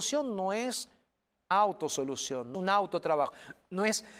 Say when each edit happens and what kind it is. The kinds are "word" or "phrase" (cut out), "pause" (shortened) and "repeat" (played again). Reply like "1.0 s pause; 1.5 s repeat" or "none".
1.5 s word; 2.5 s word

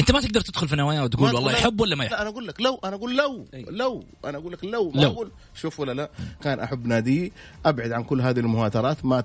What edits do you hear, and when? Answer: 2.1 s word; 6.4 s phrase

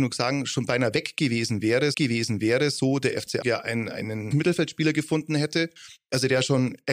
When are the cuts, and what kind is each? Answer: 1.9 s repeat; 3.4 s word; 4.3 s phrase

